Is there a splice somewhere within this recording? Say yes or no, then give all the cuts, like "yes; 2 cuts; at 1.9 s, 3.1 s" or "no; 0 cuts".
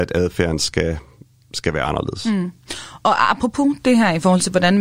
no; 0 cuts